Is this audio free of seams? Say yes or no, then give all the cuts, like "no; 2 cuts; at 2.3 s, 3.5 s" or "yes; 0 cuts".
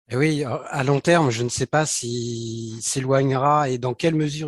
yes; 0 cuts